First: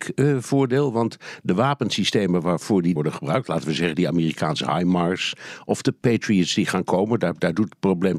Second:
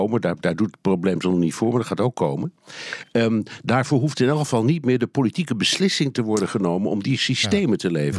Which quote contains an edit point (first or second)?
first